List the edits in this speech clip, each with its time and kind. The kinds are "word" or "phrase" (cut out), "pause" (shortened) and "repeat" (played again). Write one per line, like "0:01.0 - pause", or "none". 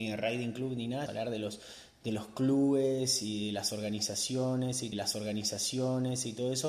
0:01.1 - phrase
0:04.9 - repeat